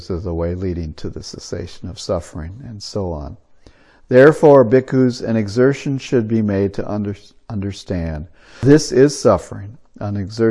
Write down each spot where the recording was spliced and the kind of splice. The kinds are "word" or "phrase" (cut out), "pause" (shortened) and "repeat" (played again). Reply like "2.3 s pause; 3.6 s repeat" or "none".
none